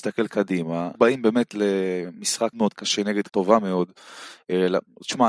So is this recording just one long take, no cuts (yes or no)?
no